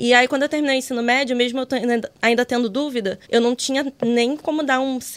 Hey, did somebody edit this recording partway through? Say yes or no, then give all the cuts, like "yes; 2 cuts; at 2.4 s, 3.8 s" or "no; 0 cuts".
yes; 1 cut; at 3.2 s